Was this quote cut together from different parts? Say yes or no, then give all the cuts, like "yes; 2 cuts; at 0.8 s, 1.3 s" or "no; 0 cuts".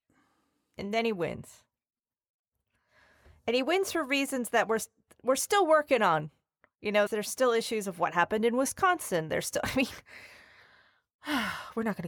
yes; 1 cut; at 7.1 s